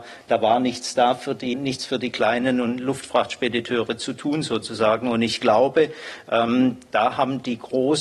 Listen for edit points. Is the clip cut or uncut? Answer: cut